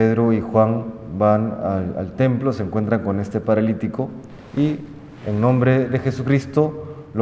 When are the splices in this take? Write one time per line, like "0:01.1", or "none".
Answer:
none